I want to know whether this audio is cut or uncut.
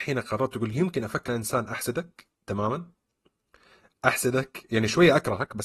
cut